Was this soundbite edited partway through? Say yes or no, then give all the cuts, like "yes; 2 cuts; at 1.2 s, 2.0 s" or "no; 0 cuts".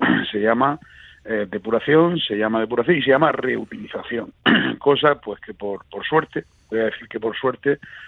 yes; 1 cut; at 5.8 s